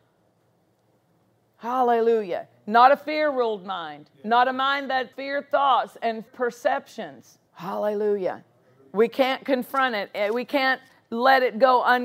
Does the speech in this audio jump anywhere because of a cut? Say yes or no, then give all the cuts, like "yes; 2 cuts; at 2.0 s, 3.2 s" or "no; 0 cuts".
yes; 4 cuts; at 4.1 s, 5.1 s, 6.3 s, 7.5 s